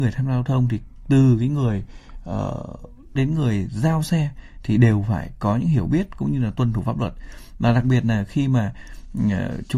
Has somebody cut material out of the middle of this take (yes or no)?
yes